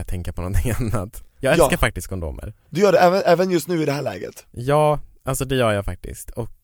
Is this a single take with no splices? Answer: yes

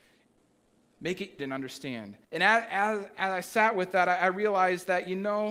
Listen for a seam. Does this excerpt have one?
yes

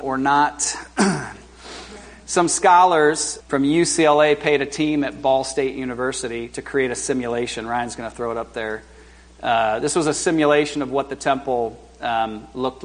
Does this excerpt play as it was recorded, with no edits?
no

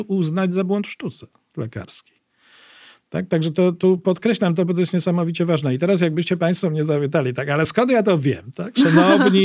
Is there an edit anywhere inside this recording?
no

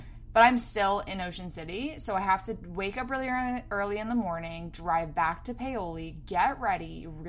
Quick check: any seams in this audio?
no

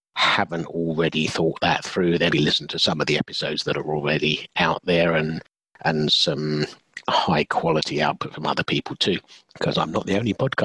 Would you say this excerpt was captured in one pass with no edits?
no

